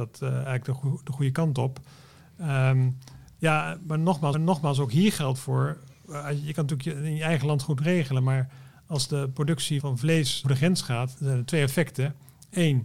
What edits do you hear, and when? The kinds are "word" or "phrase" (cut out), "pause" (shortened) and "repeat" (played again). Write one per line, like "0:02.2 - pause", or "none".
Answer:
0:04.3 - repeat
0:09.8 - word
0:10.4 - word
0:11.2 - word